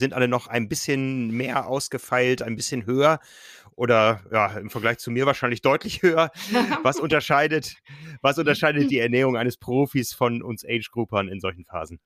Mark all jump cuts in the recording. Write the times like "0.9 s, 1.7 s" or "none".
none